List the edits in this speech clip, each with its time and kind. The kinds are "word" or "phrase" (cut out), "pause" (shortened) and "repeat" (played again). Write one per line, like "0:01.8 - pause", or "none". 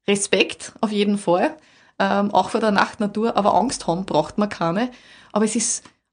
none